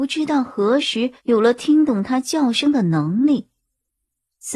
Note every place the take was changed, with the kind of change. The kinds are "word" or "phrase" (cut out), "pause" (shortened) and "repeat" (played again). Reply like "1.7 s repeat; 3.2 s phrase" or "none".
1.2 s pause